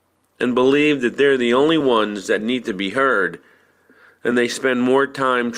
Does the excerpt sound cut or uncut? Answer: uncut